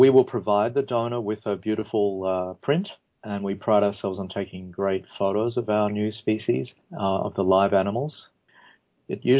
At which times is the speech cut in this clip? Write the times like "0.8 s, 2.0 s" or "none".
none